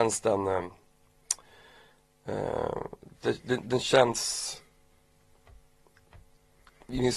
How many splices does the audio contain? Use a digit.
0